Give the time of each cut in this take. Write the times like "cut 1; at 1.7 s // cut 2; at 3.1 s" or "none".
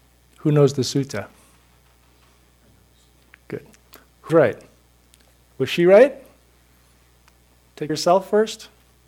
cut 1; at 4.3 s // cut 2; at 7.9 s

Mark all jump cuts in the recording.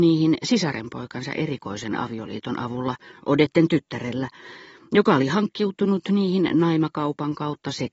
none

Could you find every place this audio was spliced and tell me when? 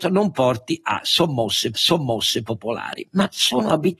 cut 1; at 1.7 s

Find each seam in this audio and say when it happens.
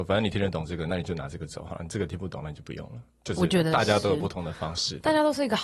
cut 1; at 3.1 s

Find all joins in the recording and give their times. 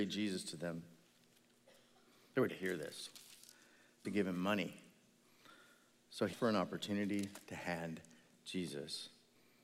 cut 1; at 2.5 s // cut 2; at 4.0 s // cut 3; at 6.3 s

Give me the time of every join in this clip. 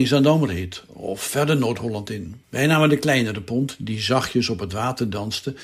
cut 1; at 2.4 s

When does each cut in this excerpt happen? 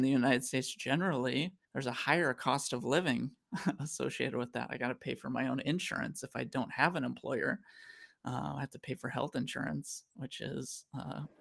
cut 1; at 1.6 s

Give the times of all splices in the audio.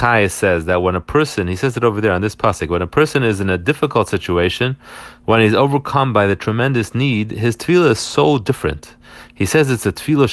none

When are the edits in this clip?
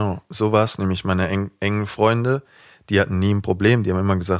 none

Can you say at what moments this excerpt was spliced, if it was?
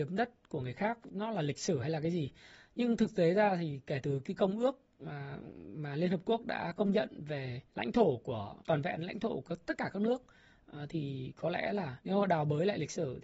cut 1; at 7.7 s // cut 2; at 8.6 s // cut 3; at 12.0 s

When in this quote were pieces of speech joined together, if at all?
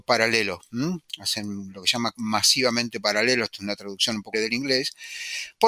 cut 1; at 2.1 s // cut 2; at 4.3 s

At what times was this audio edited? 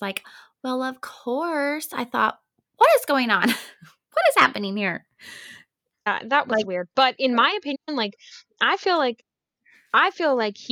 none

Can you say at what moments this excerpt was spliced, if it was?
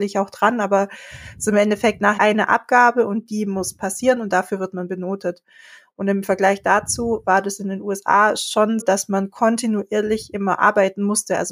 cut 1; at 2.2 s // cut 2; at 8.8 s

